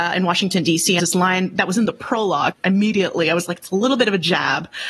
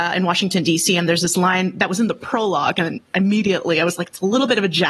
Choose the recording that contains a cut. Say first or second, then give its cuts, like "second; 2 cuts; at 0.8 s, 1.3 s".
first; 2 cuts; at 1.0 s, 2.5 s